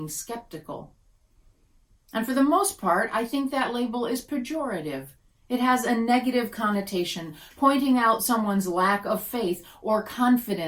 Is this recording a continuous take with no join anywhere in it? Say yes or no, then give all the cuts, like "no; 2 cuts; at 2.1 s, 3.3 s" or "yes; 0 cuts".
yes; 0 cuts